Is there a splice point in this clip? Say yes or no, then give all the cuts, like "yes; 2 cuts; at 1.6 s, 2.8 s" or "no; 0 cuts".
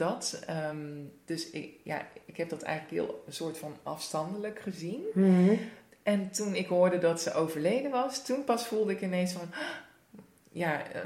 no; 0 cuts